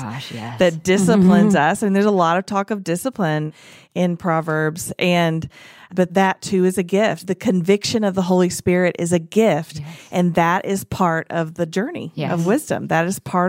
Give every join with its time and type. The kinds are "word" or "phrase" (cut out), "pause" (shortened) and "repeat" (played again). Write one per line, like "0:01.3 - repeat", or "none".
none